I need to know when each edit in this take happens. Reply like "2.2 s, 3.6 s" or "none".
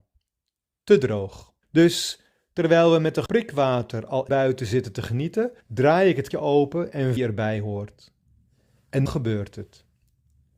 1.6 s, 3.3 s, 4.3 s, 5.6 s, 6.3 s, 7.2 s, 9.1 s